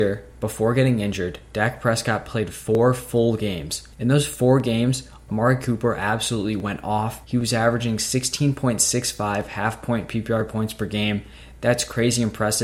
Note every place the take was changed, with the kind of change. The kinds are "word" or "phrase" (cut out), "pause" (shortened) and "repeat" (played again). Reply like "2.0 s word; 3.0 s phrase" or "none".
3.9 s pause; 7.2 s pause